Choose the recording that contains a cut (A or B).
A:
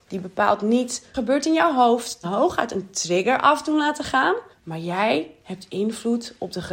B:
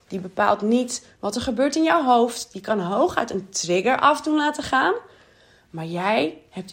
A